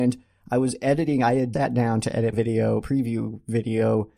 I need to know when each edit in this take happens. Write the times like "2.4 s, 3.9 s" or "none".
1.5 s, 2.3 s, 2.8 s